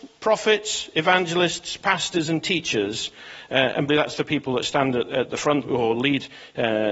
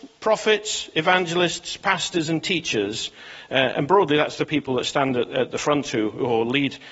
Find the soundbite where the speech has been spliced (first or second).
first